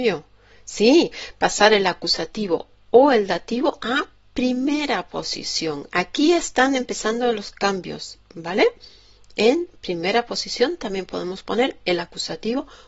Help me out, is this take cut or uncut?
uncut